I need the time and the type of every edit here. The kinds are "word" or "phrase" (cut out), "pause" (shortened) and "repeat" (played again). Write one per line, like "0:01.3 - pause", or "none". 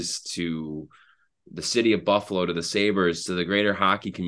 none